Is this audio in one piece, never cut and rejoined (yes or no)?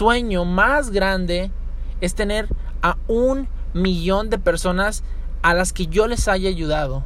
yes